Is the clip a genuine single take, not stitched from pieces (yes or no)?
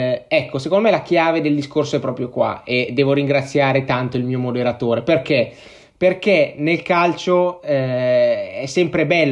yes